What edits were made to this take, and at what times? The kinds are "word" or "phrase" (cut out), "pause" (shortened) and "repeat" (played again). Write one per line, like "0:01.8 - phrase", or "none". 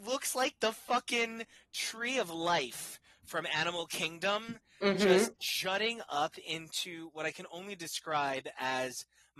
none